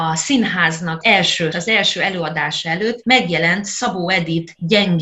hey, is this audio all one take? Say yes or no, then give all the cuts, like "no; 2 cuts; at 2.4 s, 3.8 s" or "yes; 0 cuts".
no; 3 cuts; at 1.0 s, 1.5 s, 3.0 s